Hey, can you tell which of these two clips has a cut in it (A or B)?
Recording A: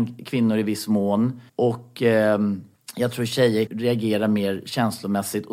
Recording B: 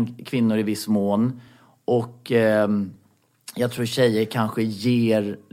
A